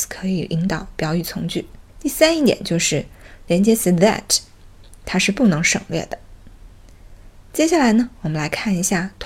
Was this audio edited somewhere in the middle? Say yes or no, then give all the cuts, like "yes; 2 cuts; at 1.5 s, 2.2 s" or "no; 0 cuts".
yes; 1 cut; at 1.9 s